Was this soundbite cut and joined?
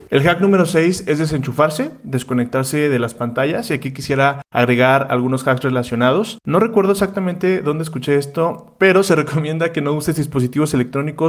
no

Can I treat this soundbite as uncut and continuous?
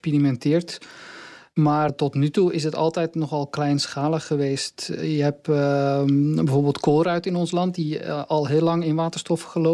no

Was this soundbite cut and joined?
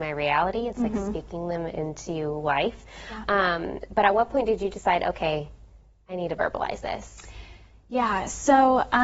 no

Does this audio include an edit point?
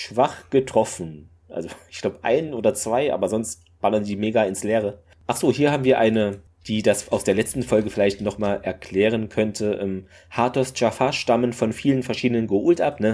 no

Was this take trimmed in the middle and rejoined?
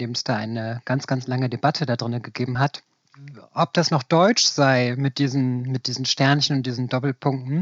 no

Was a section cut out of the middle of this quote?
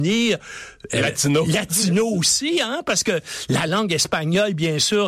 no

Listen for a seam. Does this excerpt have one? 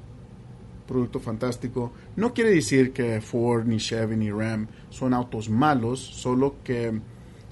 no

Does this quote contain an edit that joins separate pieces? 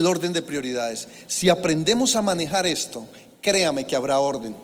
no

